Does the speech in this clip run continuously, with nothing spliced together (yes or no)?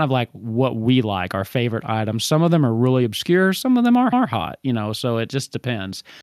no